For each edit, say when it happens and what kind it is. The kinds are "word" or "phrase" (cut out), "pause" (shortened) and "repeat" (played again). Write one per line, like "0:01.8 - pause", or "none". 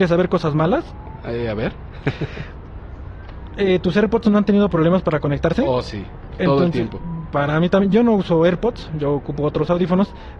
none